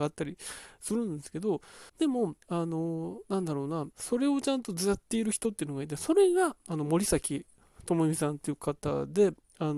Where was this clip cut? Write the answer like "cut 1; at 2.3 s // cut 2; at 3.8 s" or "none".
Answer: cut 1; at 1.9 s // cut 2; at 2.4 s // cut 3; at 3.9 s